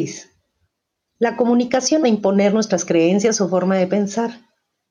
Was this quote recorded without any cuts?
no; 1 cut; at 2.0 s

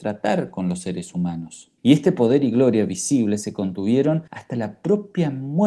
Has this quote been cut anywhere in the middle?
yes; 2 cuts; at 1.8 s, 4.3 s

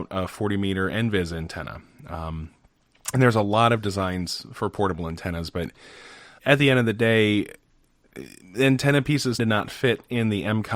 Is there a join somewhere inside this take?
yes; 2 cuts; at 6.4 s, 9.4 s

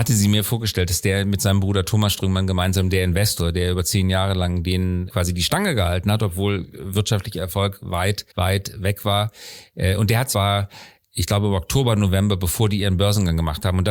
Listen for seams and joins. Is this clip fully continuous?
no; 2 cuts; at 8.3 s, 10.3 s

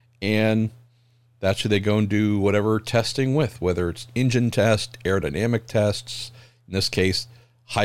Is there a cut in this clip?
no; 0 cuts

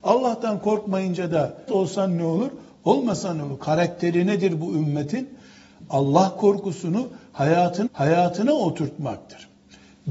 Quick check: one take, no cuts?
no; 2 cuts; at 1.7 s, 7.9 s

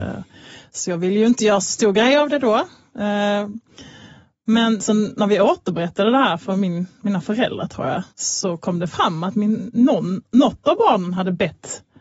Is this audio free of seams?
no; 2 cuts; at 4.8 s, 8.1 s

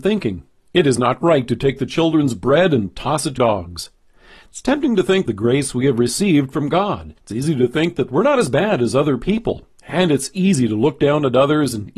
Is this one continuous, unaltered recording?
no; 3 cuts; at 3.4 s, 5.3 s, 7.2 s

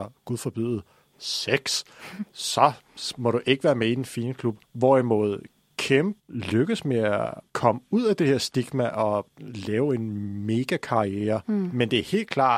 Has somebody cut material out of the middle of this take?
yes; 1 cut; at 4.6 s

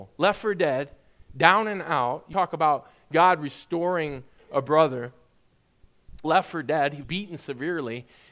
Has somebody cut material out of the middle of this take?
yes; 3 cuts; at 2.3 s, 6.2 s, 7.0 s

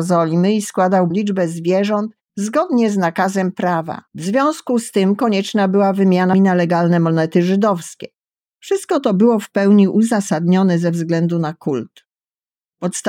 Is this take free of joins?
no; 4 cuts; at 1.1 s, 2.3 s, 4.1 s, 6.3 s

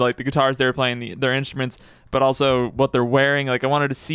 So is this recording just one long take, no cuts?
yes; 0 cuts

